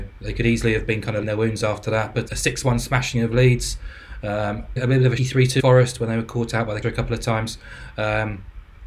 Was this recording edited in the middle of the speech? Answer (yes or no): yes